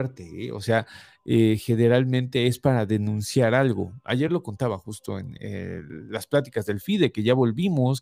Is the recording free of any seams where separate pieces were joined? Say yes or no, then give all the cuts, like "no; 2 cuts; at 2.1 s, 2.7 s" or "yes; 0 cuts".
yes; 0 cuts